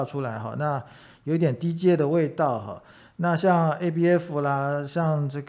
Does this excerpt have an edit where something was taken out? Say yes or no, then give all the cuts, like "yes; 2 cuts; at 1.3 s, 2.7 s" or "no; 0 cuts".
no; 0 cuts